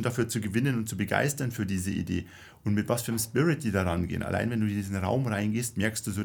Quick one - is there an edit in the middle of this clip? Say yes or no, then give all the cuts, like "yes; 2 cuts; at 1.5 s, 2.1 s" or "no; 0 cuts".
no; 0 cuts